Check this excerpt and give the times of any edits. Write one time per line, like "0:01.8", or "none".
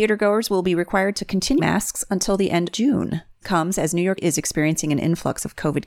0:01.6
0:02.7
0:03.4
0:04.2